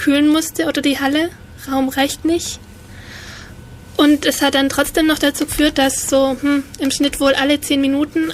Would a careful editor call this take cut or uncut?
uncut